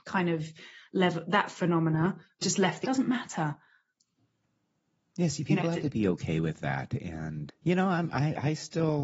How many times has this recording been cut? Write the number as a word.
three